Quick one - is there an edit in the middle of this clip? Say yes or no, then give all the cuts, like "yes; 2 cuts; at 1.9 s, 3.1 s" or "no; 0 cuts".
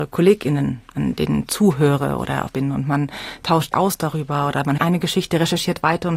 yes; 3 cuts; at 2.5 s, 3.7 s, 4.8 s